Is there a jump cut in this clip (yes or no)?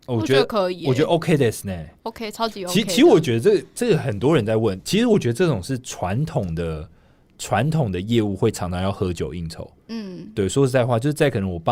no